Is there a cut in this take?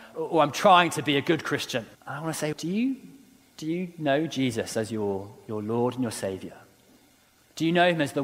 yes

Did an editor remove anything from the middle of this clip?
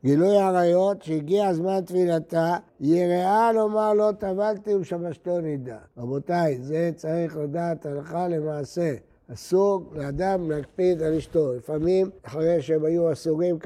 yes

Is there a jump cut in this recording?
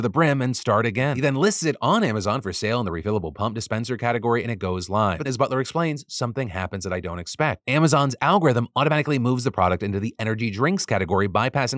yes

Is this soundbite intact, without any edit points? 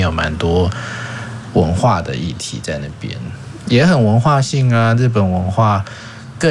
no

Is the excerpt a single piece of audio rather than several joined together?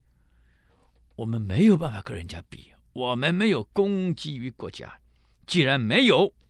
yes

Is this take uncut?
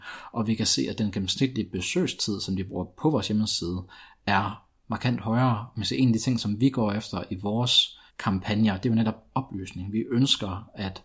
no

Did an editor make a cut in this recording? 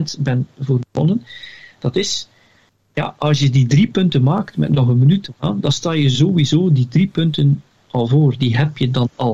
no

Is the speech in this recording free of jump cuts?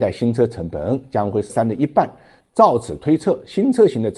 no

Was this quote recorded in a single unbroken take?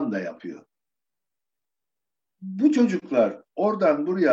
yes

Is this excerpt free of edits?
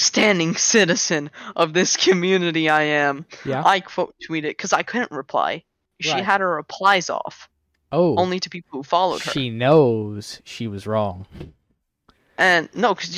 yes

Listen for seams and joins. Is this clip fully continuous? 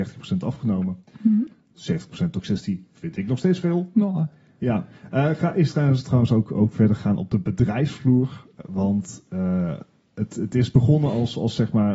yes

